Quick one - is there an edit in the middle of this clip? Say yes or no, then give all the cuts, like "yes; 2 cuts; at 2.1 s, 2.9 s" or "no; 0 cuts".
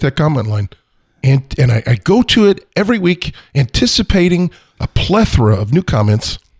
no; 0 cuts